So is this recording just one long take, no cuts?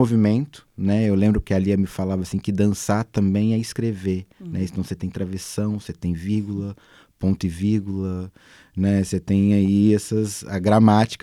yes; 0 cuts

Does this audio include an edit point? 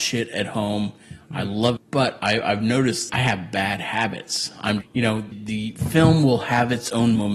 yes; 4 cuts; at 1.8 s, 3.1 s, 4.8 s, 5.3 s

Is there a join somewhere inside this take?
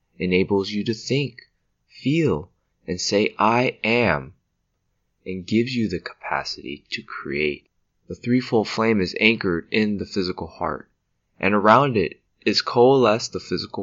no; 0 cuts

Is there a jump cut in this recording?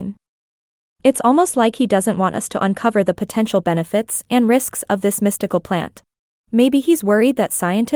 yes; 1 cut; at 6.4 s

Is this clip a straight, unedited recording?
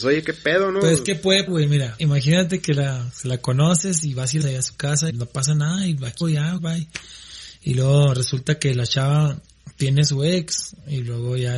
no; 6 cuts; at 1.5 s, 2.0 s, 4.4 s, 5.1 s, 6.2 s, 6.6 s

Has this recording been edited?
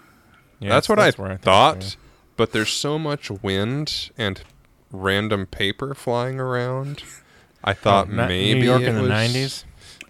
no; 0 cuts

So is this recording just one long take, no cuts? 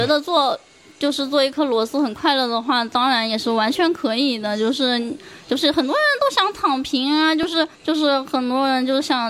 no; 1 cut; at 7.7 s

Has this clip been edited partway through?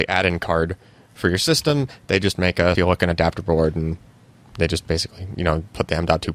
yes; 1 cut; at 2.8 s

